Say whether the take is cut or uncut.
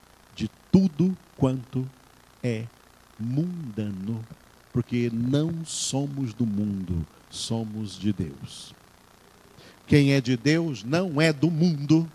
uncut